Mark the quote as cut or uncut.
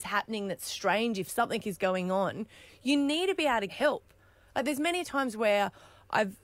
cut